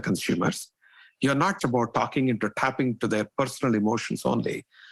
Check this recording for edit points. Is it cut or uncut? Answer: cut